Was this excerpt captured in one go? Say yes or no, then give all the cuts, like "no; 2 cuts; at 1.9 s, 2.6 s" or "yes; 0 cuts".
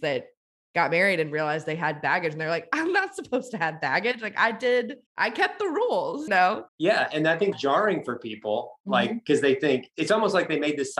no; 4 cuts; at 5.1 s, 6.3 s, 6.7 s, 7.5 s